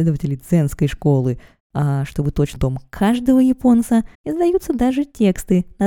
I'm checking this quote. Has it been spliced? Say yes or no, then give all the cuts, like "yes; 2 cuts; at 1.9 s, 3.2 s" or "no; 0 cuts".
yes; 3 cuts; at 1.6 s, 2.6 s, 4.1 s